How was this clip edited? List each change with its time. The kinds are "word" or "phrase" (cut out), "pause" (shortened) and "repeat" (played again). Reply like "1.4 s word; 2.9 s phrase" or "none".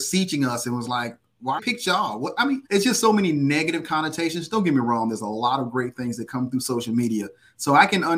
1.6 s phrase; 2.7 s pause